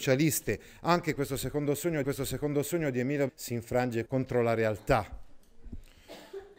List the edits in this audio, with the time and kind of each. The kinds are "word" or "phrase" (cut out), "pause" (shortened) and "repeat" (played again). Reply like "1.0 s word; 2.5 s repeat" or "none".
2.0 s repeat; 3.3 s word; 4.1 s word